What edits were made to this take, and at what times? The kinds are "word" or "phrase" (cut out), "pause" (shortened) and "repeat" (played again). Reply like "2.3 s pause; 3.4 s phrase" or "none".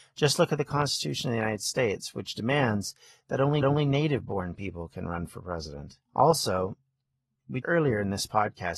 3.6 s repeat; 6.1 s pause; 7.6 s word